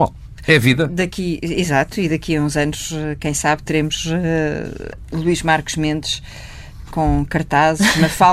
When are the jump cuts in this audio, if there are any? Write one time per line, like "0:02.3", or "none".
none